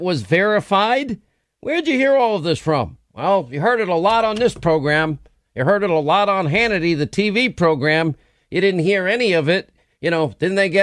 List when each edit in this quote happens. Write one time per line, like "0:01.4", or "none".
none